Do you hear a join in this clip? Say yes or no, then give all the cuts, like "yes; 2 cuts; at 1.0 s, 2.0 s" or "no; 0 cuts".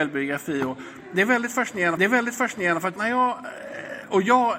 yes; 2 cuts; at 2.0 s, 3.0 s